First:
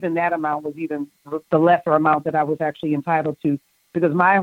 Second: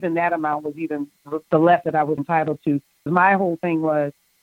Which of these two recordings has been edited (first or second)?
second